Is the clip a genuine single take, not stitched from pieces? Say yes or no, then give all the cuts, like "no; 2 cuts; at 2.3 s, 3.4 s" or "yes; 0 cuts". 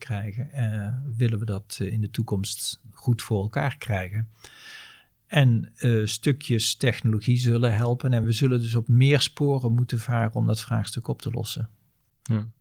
yes; 0 cuts